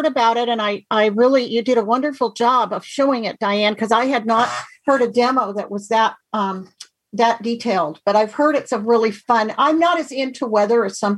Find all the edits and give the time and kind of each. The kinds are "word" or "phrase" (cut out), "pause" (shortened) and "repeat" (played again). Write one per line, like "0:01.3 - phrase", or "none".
none